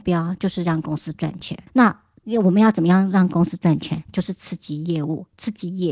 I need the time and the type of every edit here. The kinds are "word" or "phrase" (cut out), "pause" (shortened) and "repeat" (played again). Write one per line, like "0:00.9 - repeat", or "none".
0:01.7 - pause